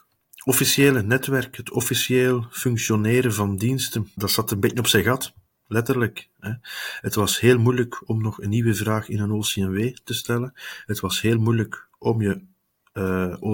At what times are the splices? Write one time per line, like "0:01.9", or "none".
none